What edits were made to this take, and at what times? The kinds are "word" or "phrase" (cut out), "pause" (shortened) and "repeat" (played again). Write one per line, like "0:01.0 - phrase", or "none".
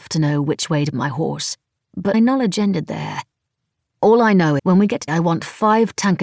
0:00.9 - word
0:02.1 - word
0:04.6 - word
0:05.1 - word